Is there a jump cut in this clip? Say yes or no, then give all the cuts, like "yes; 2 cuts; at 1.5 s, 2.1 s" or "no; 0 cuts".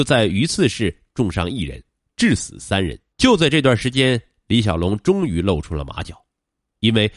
yes; 1 cut; at 3.1 s